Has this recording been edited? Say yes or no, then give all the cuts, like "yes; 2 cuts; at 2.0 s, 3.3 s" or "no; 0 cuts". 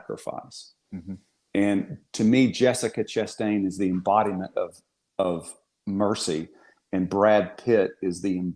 no; 0 cuts